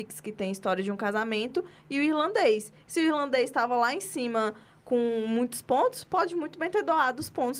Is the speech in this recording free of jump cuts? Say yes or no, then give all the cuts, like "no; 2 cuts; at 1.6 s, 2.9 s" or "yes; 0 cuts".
yes; 0 cuts